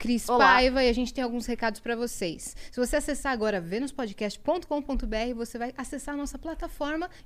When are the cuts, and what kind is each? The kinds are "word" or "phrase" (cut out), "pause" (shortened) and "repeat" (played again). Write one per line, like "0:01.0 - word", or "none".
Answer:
none